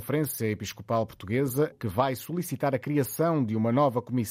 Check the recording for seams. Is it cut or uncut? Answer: cut